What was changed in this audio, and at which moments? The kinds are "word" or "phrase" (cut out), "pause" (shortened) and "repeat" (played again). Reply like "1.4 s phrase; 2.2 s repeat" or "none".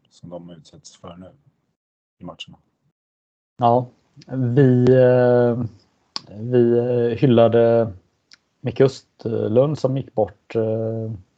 none